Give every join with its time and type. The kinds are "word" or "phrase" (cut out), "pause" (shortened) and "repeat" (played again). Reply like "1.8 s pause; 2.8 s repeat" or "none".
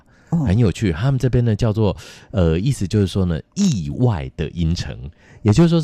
none